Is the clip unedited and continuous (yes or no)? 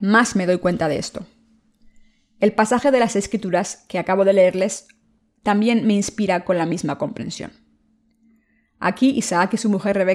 yes